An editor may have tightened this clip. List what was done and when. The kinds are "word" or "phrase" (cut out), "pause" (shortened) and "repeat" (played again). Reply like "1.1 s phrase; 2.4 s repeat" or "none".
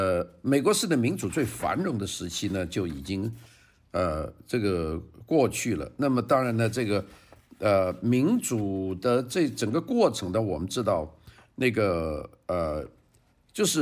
none